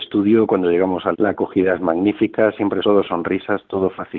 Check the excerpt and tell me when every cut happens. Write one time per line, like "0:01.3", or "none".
0:01.1
0:02.8